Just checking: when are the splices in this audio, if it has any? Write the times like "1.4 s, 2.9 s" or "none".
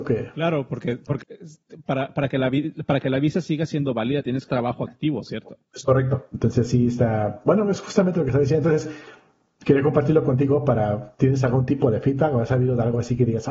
1.2 s, 4.5 s, 5.7 s